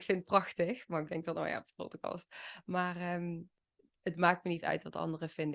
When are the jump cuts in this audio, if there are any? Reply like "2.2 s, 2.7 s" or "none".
none